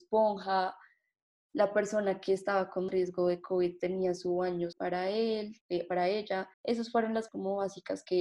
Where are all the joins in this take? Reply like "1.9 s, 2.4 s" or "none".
2.9 s, 3.8 s, 4.7 s, 5.6 s, 6.5 s, 7.3 s